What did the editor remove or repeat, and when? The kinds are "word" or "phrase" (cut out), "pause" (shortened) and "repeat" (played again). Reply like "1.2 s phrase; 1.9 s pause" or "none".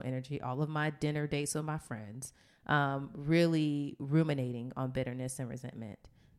none